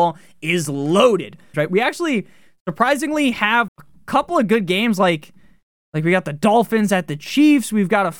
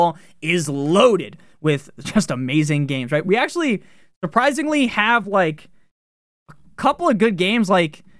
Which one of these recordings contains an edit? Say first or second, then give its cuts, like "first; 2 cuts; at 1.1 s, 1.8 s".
first; 2 cuts; at 1.5 s, 3.7 s